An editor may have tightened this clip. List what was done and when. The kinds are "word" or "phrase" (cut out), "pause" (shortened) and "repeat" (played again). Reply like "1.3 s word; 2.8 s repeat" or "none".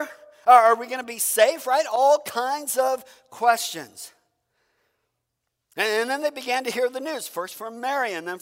none

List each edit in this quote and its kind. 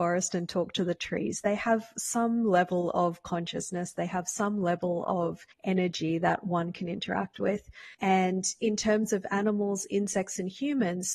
5.5 s pause; 7.9 s pause

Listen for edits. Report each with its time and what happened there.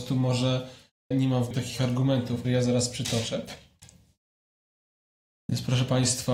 1.1 s word; 1.5 s word; 2.4 s word

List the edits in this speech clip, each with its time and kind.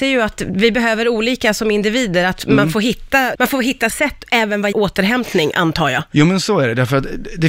3.3 s word; 3.9 s word; 4.7 s word

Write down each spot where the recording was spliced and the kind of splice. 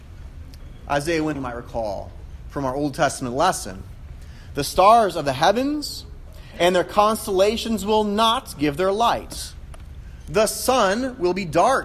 1.3 s word

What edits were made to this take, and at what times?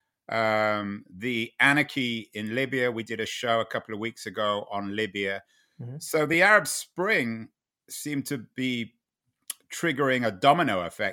none

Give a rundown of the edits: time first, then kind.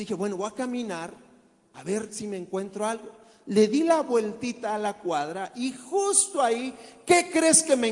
none

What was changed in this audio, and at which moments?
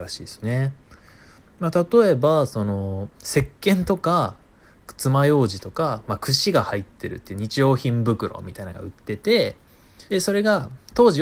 3.1 s pause; 10.1 s pause

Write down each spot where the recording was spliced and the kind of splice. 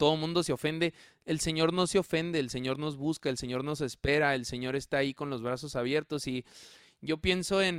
none

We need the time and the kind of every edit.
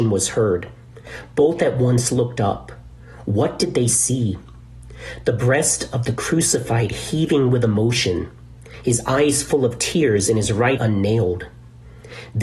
10.8 s word

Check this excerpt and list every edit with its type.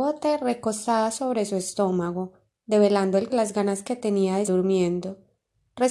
3.3 s word; 4.4 s word

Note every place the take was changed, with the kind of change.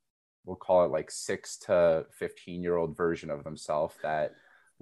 none

